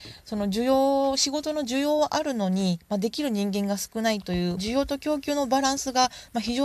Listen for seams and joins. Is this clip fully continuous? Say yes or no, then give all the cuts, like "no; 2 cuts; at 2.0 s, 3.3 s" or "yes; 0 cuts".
no; 1 cut; at 4.6 s